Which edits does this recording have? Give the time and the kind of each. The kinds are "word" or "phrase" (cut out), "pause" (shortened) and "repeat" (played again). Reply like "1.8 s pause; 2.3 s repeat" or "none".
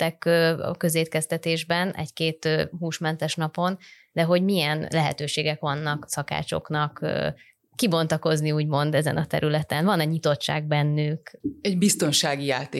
2.7 s word